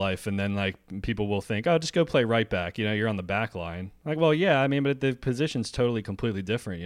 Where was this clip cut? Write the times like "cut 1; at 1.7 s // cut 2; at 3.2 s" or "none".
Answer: none

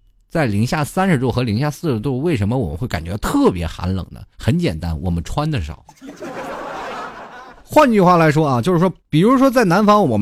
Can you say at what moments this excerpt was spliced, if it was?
cut 1; at 4.3 s // cut 2; at 7.6 s // cut 3; at 9.0 s

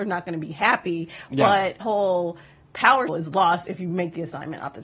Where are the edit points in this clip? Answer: cut 1; at 1.8 s // cut 2; at 3.1 s

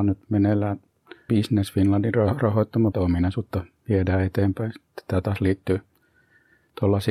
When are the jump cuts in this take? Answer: cut 1; at 1.3 s // cut 2; at 2.9 s

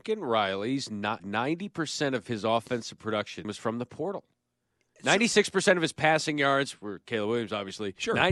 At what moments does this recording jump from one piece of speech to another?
cut 1; at 1.2 s

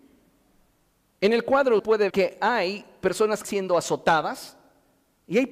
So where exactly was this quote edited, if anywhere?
cut 1; at 1.8 s // cut 2; at 2.1 s // cut 3; at 3.4 s

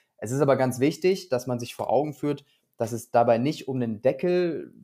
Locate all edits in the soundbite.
none

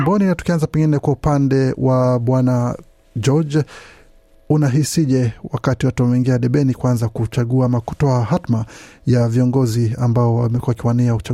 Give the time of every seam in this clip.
none

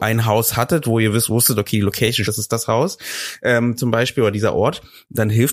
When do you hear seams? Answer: cut 1; at 2.2 s

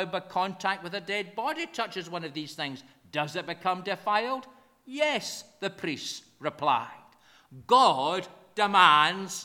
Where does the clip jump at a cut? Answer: none

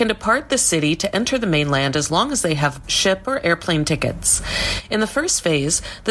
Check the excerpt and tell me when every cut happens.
cut 1; at 2.8 s

